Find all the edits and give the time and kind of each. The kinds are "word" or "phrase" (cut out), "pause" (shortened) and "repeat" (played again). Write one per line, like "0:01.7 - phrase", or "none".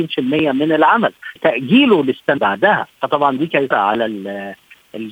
0:01.4 - word
0:02.4 - word
0:02.9 - pause
0:03.7 - word